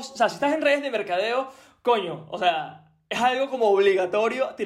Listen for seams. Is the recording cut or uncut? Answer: uncut